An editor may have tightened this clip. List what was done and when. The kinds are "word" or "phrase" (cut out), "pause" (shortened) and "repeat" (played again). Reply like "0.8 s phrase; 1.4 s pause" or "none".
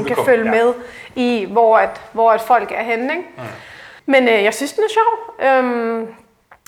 4.0 s pause